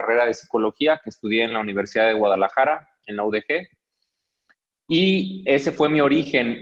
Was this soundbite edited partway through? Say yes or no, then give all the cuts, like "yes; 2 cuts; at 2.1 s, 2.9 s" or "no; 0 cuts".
no; 0 cuts